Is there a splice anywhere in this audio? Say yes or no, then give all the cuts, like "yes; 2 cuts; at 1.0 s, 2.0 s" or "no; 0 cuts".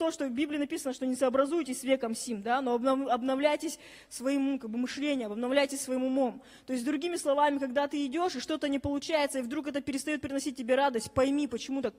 no; 0 cuts